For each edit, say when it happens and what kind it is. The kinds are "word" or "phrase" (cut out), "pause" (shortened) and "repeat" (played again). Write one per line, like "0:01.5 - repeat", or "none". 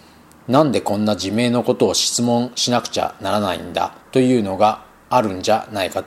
0:04.0 - pause

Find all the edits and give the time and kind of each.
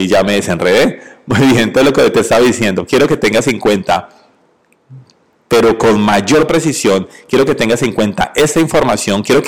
none

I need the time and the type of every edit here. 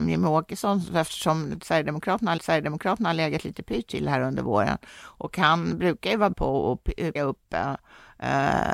0:02.4 - repeat
0:06.3 - word
0:07.2 - word

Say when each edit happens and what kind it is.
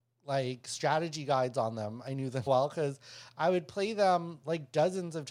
0:02.5 - word

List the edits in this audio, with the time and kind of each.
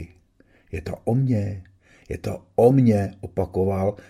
none

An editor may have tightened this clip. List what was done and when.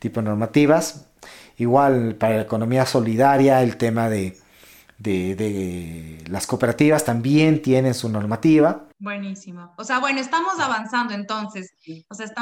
0:08.9 - pause

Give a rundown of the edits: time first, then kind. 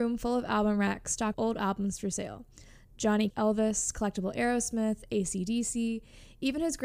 0:01.3 - word
0:03.3 - word

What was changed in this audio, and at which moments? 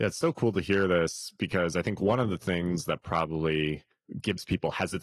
none

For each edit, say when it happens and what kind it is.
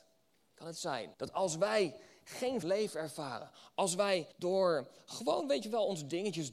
0:01.1 - pause
0:02.6 - phrase
0:04.3 - pause

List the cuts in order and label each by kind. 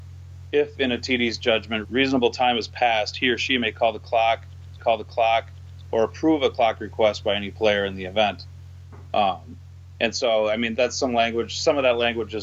0:01.8 - word
0:04.8 - repeat
0:10.7 - word

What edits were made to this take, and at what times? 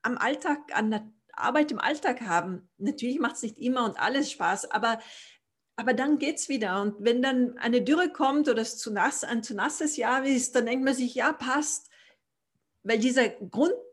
none

